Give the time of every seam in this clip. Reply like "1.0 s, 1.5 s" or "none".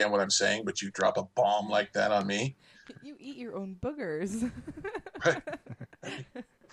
none